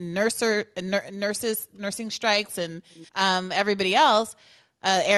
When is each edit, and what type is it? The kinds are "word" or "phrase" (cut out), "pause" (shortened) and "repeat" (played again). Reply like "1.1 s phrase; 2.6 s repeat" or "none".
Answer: 3.1 s pause